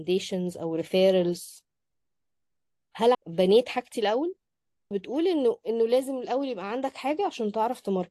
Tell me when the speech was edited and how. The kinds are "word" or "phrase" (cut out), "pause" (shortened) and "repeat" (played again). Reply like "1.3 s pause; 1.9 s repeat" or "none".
3.1 s phrase; 4.9 s word